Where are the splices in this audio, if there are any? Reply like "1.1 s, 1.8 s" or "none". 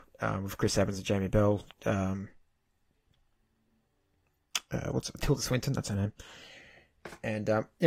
1.7 s